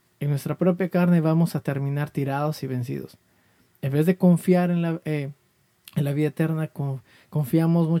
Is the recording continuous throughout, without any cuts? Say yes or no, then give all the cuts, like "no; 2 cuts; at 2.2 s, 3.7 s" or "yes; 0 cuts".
yes; 0 cuts